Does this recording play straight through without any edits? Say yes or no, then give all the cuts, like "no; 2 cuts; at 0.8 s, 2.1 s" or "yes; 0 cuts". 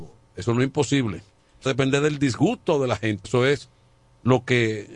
no; 2 cuts; at 1.7 s, 3.2 s